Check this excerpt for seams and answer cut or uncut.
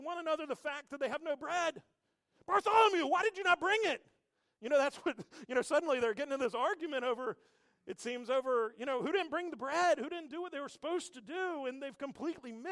uncut